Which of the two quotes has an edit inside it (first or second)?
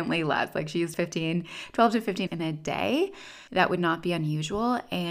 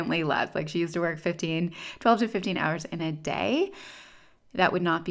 first